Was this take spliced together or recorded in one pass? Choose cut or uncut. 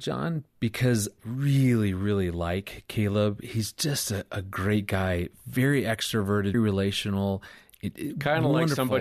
cut